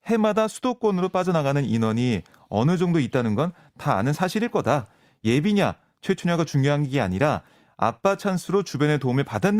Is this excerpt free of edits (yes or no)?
yes